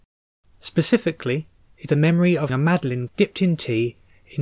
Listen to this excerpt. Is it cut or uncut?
cut